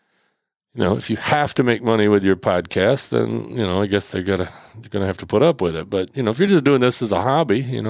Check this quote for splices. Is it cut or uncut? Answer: uncut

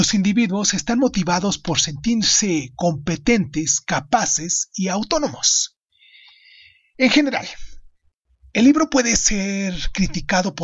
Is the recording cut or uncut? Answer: uncut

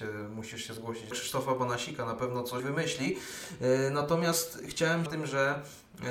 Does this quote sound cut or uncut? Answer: cut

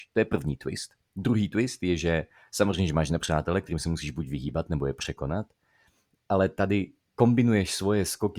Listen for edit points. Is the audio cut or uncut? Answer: uncut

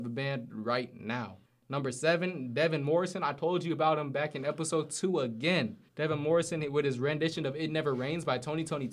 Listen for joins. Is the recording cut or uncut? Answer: cut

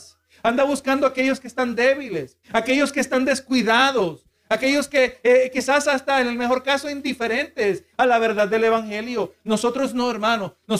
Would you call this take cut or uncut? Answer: cut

